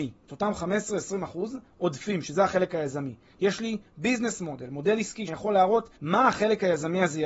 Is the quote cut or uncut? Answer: cut